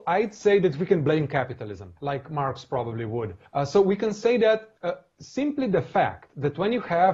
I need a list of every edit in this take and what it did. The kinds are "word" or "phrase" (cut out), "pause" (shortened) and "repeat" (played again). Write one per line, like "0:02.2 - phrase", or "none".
0:02.0 - pause
0:03.5 - pause
0:04.8 - pause